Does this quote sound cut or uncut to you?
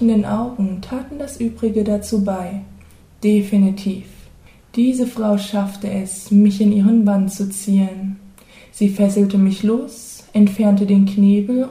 uncut